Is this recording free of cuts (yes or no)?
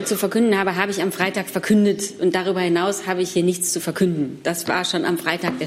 yes